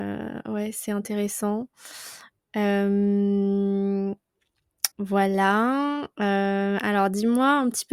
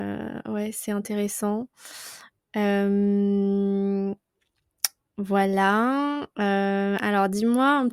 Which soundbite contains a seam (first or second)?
first